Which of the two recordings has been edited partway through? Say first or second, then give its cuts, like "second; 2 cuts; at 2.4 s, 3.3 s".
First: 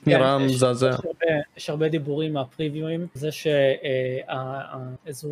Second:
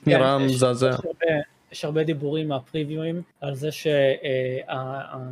first; 2 cuts; at 1.5 s, 3.2 s